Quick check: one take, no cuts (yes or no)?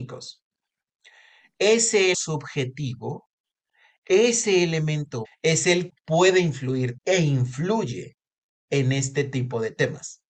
no